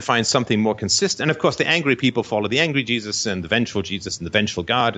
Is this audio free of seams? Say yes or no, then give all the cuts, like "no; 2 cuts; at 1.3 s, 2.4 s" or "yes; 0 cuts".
yes; 0 cuts